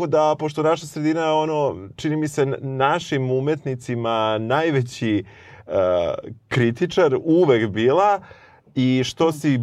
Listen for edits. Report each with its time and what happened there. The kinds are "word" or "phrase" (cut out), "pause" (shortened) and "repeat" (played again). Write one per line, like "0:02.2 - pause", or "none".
none